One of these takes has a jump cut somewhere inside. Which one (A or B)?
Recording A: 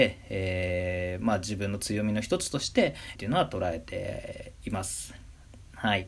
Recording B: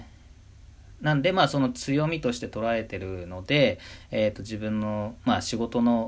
A